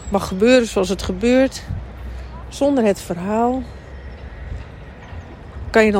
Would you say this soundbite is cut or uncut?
uncut